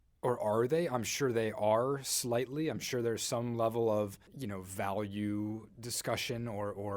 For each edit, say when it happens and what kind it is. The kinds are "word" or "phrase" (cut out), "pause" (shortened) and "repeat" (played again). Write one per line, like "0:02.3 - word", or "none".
0:04.3 - pause